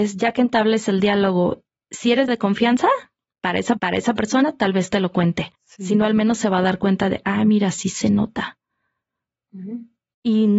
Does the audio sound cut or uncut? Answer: cut